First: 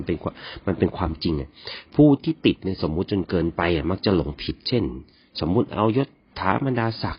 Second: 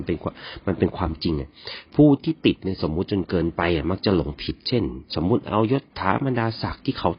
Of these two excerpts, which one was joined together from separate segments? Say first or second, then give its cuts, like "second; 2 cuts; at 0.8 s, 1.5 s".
second; 2 cuts; at 5.1 s, 5.9 s